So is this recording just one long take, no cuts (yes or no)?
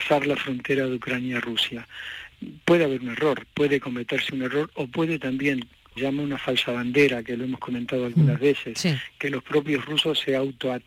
no